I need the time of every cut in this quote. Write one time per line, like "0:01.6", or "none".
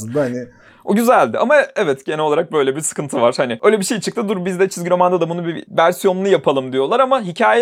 none